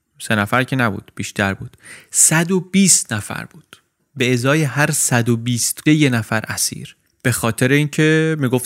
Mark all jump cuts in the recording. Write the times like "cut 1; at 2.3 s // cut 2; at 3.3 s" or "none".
cut 1; at 5.9 s